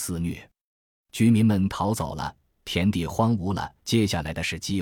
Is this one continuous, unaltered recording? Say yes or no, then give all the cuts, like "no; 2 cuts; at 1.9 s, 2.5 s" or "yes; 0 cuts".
no; 1 cut; at 3.8 s